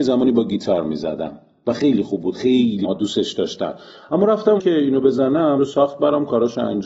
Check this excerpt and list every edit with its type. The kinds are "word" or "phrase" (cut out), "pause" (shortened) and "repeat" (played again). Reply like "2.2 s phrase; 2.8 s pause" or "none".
2.8 s word; 4.6 s word; 5.6 s word